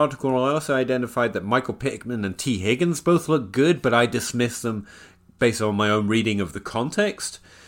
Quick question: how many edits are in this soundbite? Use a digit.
1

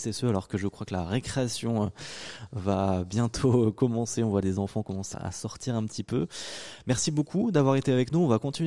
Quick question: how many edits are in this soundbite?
1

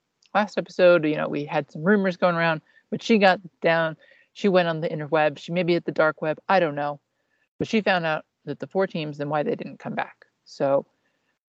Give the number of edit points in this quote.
0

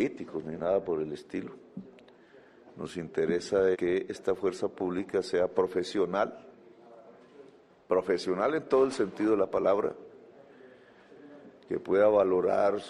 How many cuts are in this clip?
1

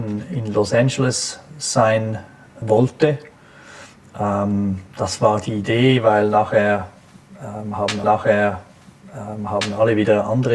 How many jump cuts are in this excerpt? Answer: 2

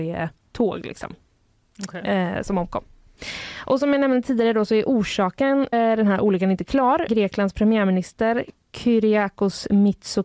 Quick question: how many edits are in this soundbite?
2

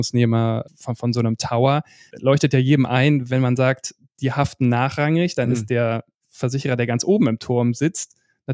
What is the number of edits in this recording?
0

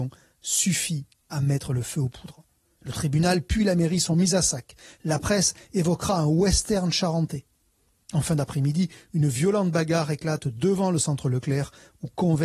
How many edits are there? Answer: 0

